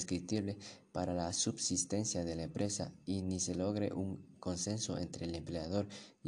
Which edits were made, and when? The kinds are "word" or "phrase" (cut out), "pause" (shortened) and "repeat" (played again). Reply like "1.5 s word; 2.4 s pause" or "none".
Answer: none